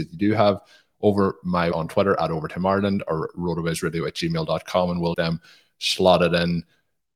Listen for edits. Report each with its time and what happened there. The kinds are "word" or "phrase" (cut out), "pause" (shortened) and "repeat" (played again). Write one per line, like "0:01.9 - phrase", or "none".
0:01.7 - word
0:05.1 - word